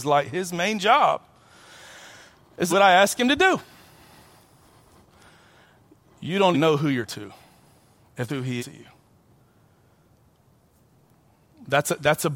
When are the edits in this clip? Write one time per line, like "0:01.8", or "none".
0:02.7
0:06.5
0:07.1
0:08.3
0:08.6